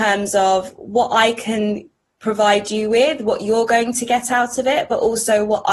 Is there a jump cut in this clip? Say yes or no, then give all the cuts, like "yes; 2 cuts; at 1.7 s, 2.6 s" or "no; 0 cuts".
no; 0 cuts